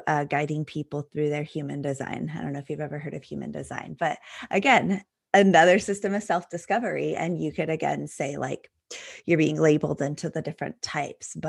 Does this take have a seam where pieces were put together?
no; 0 cuts

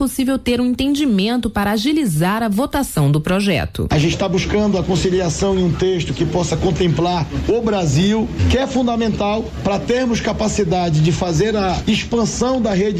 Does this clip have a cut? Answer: no; 0 cuts

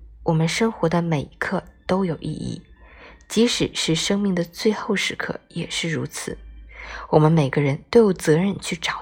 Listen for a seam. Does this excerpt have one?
no; 0 cuts

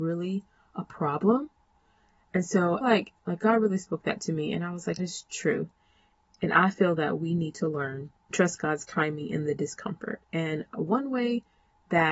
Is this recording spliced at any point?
yes; 3 cuts; at 2.8 s, 5.0 s, 8.3 s

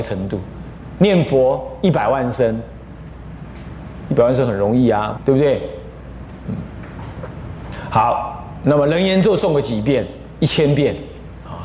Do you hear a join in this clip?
yes; 1 cut; at 5.2 s

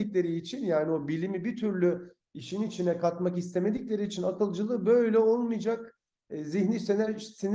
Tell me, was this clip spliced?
no; 0 cuts

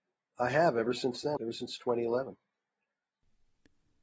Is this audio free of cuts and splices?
no; 1 cut; at 1.4 s

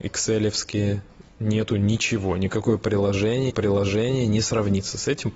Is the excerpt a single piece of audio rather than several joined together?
no; 1 cut; at 3.5 s

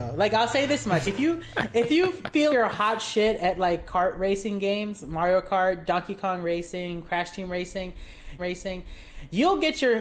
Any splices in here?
yes; 3 cuts; at 1.1 s, 2.5 s, 8.4 s

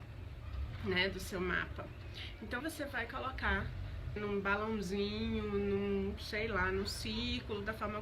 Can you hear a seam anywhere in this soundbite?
yes; 2 cuts; at 2.6 s, 4.2 s

